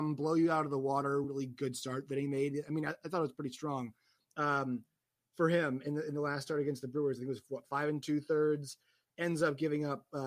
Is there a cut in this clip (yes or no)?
no